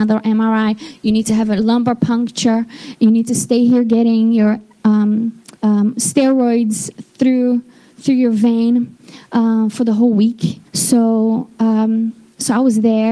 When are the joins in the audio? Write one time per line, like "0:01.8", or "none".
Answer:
0:05.6
0:10.7